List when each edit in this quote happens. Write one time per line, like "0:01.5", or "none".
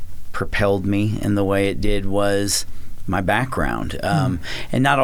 none